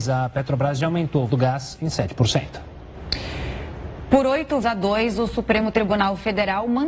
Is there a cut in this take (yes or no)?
yes